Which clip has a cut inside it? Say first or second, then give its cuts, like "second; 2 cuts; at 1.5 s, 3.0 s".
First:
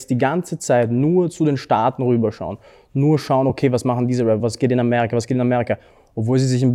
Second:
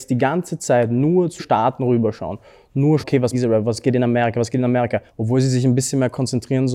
second; 4 cuts; at 1.4 s, 3.0 s, 3.3 s, 5.1 s